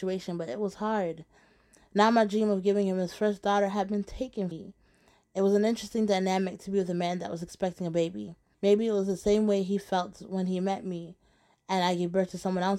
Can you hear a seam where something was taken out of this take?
yes; 2 cuts; at 4.5 s, 8.5 s

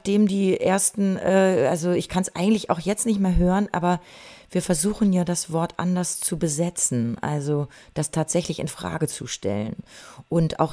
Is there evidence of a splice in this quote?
no; 0 cuts

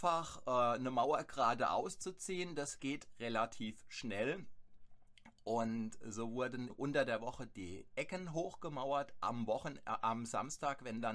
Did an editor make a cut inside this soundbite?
yes; 1 cut; at 6.7 s

